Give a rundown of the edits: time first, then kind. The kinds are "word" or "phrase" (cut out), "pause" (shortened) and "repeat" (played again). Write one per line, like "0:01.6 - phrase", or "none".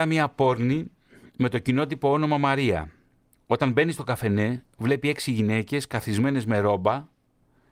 none